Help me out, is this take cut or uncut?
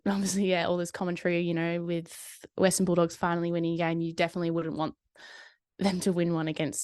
uncut